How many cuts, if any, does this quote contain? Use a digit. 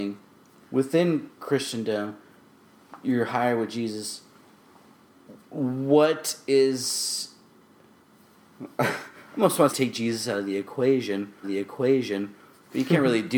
3